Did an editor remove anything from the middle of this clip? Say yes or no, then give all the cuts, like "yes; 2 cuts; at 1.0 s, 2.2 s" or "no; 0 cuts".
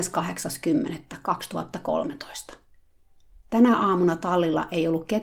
no; 0 cuts